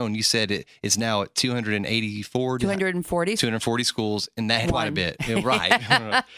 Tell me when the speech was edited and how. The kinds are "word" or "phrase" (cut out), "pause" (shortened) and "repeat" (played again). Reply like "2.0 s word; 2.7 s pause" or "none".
3.4 s word; 4.6 s phrase